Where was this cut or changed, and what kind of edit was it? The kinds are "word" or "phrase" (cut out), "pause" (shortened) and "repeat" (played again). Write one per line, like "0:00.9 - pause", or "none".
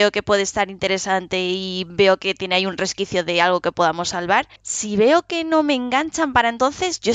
0:04.6 - pause